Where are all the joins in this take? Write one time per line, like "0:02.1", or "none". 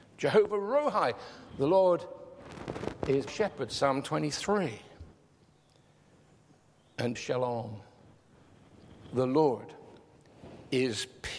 0:03.3
0:07.2